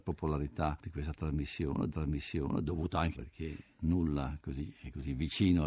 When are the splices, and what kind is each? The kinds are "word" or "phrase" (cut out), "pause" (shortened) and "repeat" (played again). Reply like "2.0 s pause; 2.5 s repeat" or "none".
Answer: 1.9 s repeat; 3.1 s word